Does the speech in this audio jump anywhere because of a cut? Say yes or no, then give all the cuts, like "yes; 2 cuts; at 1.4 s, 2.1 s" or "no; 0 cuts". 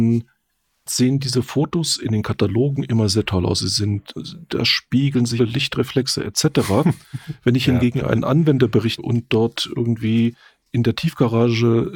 yes; 2 cuts; at 5.4 s, 9.0 s